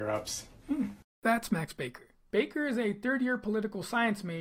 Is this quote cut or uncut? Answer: uncut